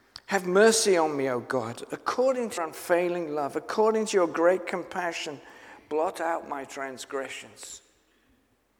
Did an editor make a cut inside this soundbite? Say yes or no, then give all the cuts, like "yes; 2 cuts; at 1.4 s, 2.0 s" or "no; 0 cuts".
yes; 1 cut; at 2.6 s